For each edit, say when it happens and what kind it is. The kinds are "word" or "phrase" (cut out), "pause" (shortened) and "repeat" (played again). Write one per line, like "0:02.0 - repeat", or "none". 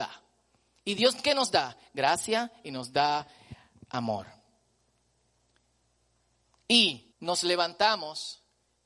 0:07.1 - pause